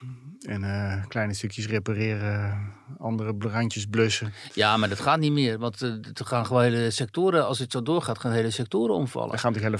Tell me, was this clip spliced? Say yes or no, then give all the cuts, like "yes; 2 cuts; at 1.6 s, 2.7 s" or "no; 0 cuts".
no; 0 cuts